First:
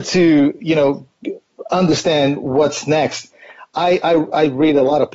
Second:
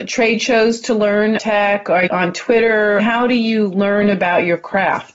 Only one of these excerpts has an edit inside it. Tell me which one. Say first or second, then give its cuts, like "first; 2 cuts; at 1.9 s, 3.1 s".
second; 3 cuts; at 1.4 s, 2.1 s, 3.0 s